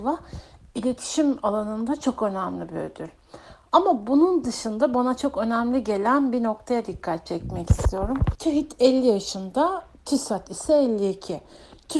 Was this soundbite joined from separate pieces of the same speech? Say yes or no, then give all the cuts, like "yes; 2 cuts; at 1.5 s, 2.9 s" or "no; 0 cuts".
no; 0 cuts